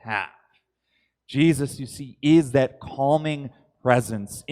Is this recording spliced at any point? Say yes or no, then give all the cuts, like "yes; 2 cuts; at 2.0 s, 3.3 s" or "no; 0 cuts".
no; 0 cuts